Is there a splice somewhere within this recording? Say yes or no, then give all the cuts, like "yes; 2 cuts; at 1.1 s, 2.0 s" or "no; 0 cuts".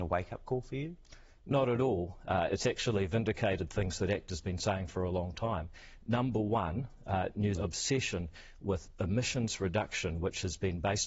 yes; 1 cut; at 7.6 s